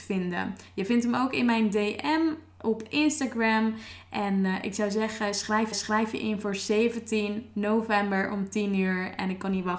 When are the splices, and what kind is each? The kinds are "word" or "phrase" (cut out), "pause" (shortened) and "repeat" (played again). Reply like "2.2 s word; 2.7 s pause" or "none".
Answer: 5.7 s repeat

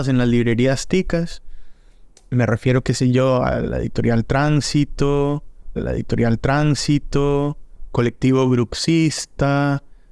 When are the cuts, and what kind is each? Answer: 5.8 s repeat

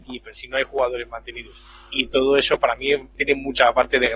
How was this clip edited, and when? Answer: 3.1 s word

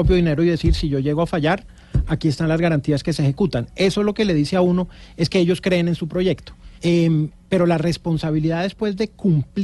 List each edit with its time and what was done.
6.8 s pause

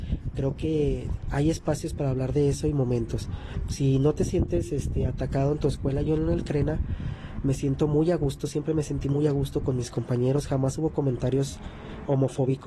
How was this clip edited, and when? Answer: none

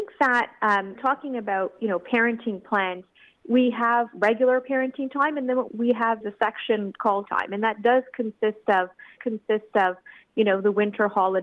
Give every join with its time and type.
1.0 s phrase; 5.7 s word; 6.2 s word; 7.3 s phrase; 9.2 s repeat

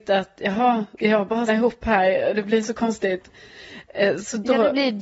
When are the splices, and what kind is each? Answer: 1.0 s word; 1.5 s word

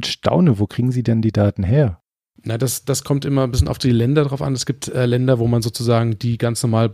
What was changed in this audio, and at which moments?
none

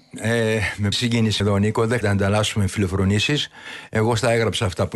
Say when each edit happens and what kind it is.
0.9 s word; 1.4 s word; 2.0 s word

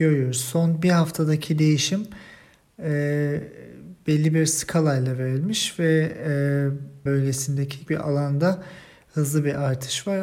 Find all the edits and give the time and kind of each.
7.1 s word; 7.9 s word

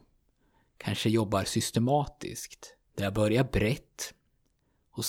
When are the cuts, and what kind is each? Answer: 2.9 s pause

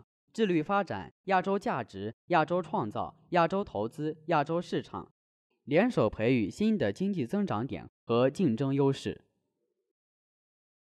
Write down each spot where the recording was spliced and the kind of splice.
none

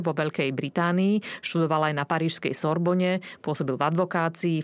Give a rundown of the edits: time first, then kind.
none

